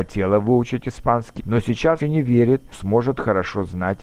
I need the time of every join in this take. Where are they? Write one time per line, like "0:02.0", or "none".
0:01.4
0:02.0
0:02.7